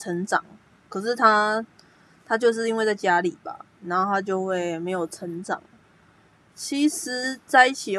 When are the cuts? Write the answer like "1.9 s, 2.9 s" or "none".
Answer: none